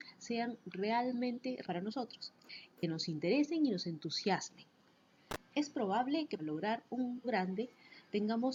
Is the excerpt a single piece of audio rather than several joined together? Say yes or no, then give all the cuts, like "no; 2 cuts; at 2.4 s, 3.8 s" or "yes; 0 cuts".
no; 3 cuts; at 1.6 s, 6.4 s, 7.2 s